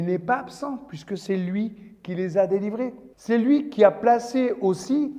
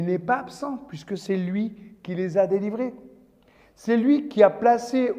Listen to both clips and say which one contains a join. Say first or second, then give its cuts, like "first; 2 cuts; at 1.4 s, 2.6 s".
first; 1 cut; at 3.1 s